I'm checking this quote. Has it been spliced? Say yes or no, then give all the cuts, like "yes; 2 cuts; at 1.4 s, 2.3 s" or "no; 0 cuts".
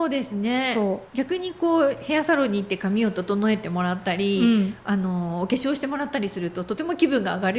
yes; 1 cut; at 1.1 s